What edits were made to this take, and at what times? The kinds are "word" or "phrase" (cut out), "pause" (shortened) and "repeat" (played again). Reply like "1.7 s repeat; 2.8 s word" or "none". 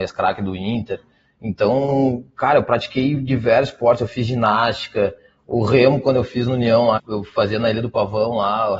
7.0 s word

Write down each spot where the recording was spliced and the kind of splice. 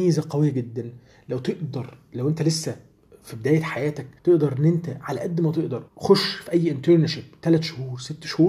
4.2 s pause; 5.9 s pause

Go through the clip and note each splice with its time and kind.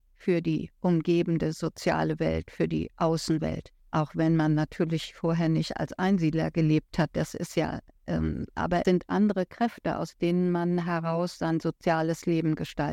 3.8 s pause; 7.9 s pause; 8.8 s word

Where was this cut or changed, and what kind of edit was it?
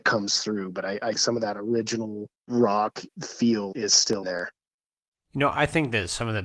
1.1 s word; 2.5 s word; 3.1 s word; 3.7 s word; 4.2 s word

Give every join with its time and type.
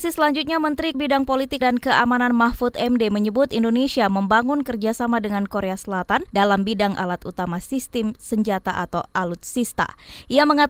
0.9 s word; 1.6 s word; 6.3 s pause

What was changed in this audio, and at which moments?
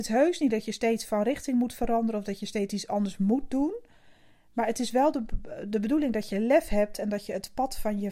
none

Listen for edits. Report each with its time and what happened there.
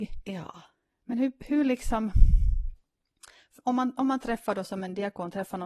none

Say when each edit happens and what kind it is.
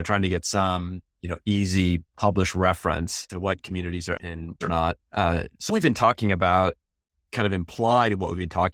3.3 s word; 4.2 s word; 4.6 s phrase; 5.0 s pause; 5.7 s word

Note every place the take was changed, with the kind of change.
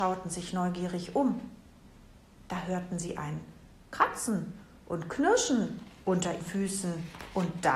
6.4 s word

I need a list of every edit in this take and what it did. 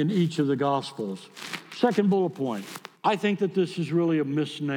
3.0 s pause

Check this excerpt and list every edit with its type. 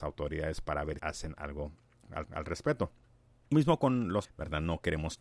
1.0 s word; 2.2 s repeat; 3.5 s word; 4.2 s word

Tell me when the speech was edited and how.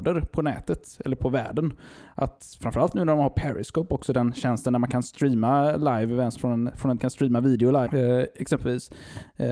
1.2 s word; 6.4 s word; 7.0 s word; 7.9 s word

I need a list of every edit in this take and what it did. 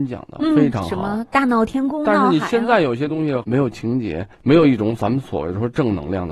2.0 s phrase

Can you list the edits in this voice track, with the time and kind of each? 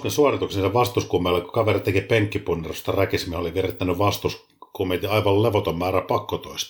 none

